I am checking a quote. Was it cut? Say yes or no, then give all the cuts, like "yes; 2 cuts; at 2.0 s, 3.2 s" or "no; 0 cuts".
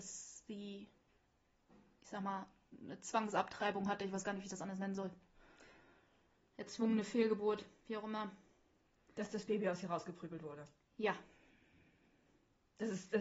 no; 0 cuts